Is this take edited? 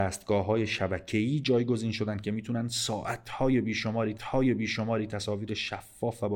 yes; 1 cut; at 4.2 s

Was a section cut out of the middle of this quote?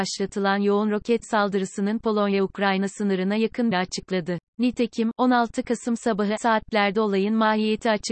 yes; 3 cuts; at 3.7 s, 4.5 s, 6.4 s

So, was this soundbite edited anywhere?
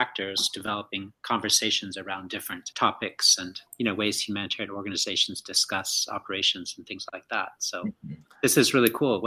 yes; 1 cut; at 3.7 s

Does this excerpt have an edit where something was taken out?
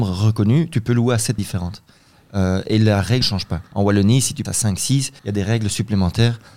yes; 5 cuts; at 1.4 s, 3.2 s, 3.7 s, 4.4 s, 5.2 s

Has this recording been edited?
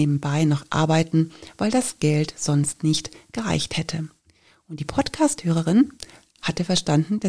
no; 0 cuts

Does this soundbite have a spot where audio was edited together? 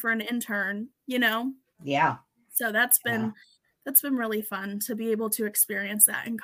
no; 0 cuts

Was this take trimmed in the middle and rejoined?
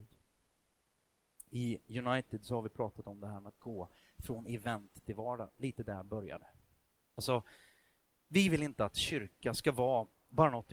no; 0 cuts

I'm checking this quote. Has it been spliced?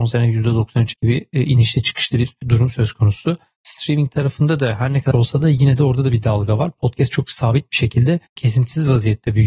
yes; 3 cuts; at 0.9 s, 5.1 s, 8.3 s

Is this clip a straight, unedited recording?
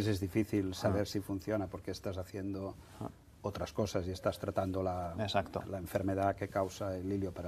yes; 0 cuts

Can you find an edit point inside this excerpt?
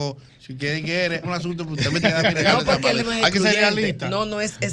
yes; 3 cuts; at 1.2 s, 2.0 s, 3.0 s

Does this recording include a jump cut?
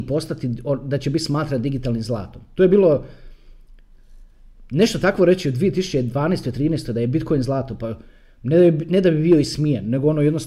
no; 0 cuts

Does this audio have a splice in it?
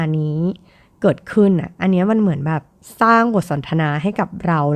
no; 0 cuts

